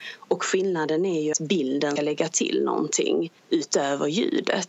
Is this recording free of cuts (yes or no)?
no